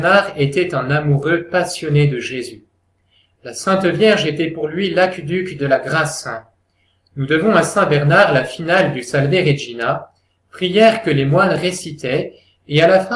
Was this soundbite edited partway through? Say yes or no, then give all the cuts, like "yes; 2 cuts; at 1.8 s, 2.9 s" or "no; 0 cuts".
no; 0 cuts